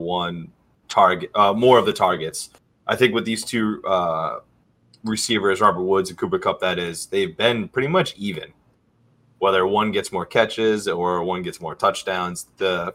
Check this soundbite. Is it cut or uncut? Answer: uncut